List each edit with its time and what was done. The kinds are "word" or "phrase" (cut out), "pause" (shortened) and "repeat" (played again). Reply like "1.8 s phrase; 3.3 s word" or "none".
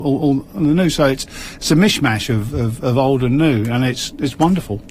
none